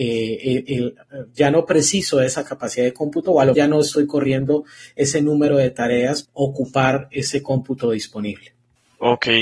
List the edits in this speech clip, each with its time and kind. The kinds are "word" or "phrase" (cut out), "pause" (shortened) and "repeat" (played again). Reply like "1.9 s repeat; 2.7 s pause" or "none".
3.5 s word; 6.2 s word